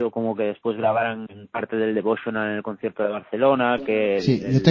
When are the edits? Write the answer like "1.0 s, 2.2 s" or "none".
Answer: none